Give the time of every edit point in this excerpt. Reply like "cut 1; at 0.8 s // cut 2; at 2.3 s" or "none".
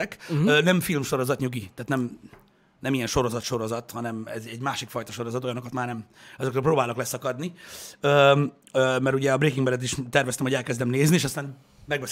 none

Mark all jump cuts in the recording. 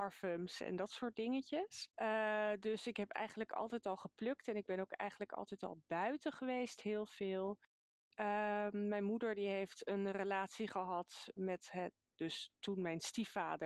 cut 1; at 1.9 s // cut 2; at 11.4 s

